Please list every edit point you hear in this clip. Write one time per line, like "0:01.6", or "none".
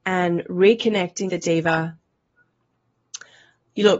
0:01.3